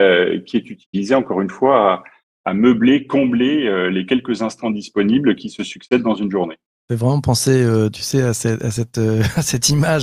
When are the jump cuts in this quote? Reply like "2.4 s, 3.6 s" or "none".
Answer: none